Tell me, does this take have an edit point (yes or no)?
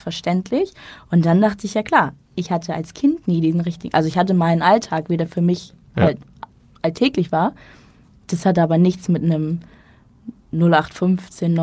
no